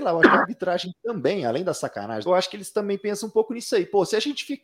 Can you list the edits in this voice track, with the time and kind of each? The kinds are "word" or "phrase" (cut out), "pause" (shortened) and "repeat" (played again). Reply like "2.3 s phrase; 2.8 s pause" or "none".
2.3 s phrase